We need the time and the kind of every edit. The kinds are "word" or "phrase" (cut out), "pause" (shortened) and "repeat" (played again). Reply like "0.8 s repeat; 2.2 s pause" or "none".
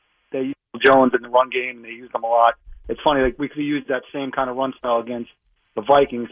none